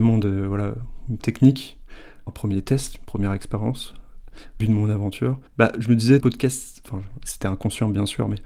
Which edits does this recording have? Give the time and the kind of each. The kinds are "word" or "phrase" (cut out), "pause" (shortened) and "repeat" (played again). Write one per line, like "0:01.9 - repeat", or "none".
0:01.2 - word
0:02.3 - word
0:04.6 - word
0:05.5 - pause
0:06.2 - phrase